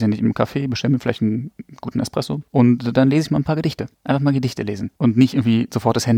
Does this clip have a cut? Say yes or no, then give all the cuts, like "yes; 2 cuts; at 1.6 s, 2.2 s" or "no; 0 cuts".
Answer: no; 0 cuts